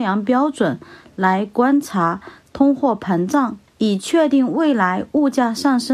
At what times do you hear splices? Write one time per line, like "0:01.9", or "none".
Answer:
0:03.7